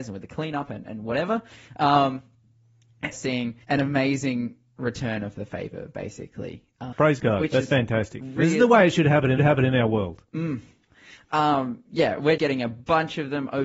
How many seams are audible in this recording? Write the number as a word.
five